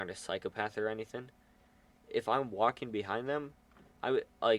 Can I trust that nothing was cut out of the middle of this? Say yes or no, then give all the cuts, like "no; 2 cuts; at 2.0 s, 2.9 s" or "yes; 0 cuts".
yes; 0 cuts